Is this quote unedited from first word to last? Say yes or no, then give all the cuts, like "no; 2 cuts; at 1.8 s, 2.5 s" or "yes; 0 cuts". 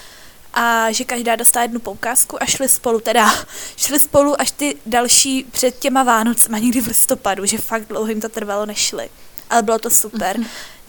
yes; 0 cuts